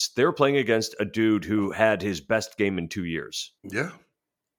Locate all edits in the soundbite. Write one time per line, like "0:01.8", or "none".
0:03.6